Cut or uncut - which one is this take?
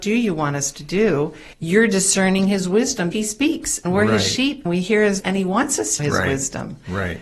cut